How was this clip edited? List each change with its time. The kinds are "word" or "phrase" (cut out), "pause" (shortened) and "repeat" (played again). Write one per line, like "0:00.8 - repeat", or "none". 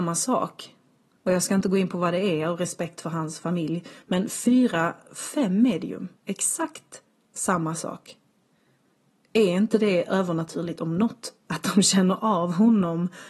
0:06.2 - pause